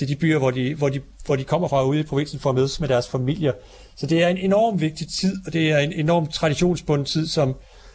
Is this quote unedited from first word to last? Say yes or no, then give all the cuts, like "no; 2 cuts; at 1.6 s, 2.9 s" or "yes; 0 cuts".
yes; 0 cuts